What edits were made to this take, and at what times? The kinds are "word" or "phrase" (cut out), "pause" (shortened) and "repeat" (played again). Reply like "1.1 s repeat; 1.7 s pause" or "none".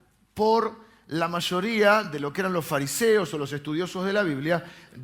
none